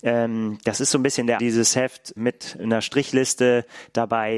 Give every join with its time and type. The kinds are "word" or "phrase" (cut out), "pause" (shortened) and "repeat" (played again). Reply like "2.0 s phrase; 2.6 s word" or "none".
1.4 s word; 2.2 s word